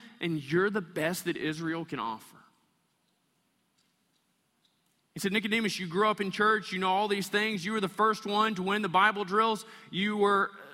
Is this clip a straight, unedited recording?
yes; 0 cuts

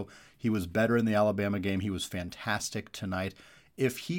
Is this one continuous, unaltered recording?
yes; 0 cuts

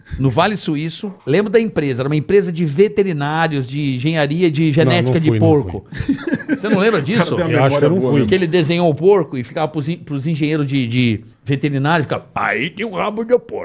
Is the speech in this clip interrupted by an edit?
yes; 2 cuts; at 1.2 s, 11.3 s

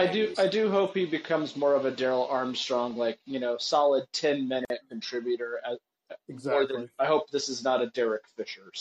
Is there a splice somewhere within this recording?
no; 0 cuts

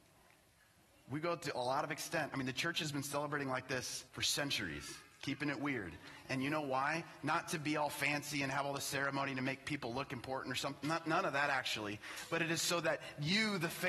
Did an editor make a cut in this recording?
yes; 1 cut; at 4.1 s

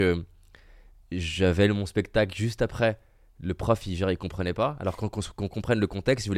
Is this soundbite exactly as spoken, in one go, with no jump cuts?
yes; 0 cuts

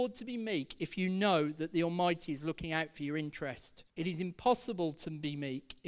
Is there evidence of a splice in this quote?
yes; 1 cut; at 3.9 s

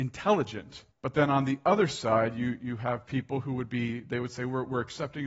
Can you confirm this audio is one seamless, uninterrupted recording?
no; 1 cut; at 0.9 s

